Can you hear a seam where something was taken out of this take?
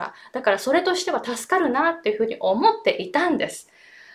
no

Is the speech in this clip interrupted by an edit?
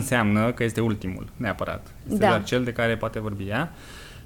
no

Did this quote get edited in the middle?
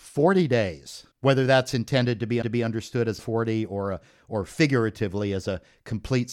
yes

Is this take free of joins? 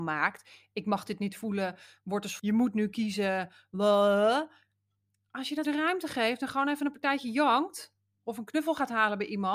no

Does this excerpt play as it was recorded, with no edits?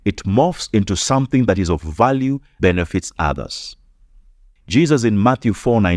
no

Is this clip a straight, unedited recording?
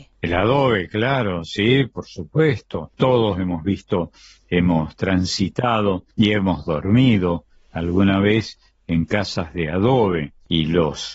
yes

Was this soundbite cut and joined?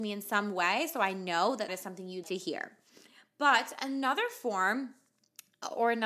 yes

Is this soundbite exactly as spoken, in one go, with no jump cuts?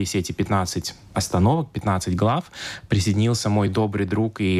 yes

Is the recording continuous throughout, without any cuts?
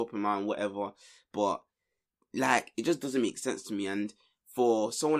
yes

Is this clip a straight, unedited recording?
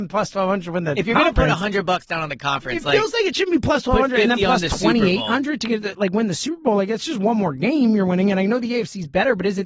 yes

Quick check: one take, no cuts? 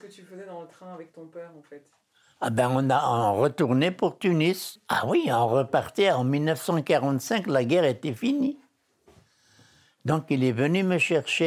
yes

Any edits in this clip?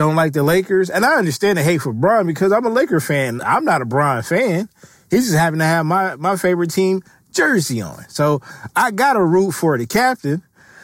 yes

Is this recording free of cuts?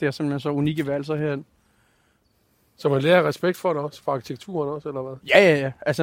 yes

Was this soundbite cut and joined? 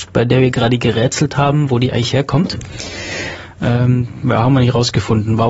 no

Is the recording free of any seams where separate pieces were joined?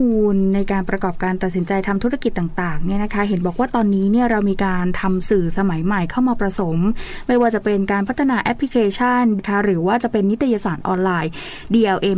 no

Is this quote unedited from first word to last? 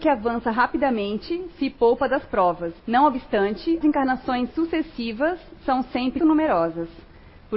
no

